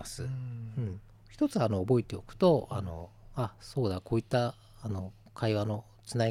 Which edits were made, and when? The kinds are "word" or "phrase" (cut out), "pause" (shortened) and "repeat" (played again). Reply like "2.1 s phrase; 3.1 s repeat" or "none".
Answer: none